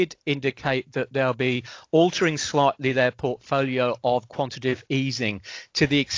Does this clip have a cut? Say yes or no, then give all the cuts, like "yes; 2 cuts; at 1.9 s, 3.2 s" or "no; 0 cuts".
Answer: no; 0 cuts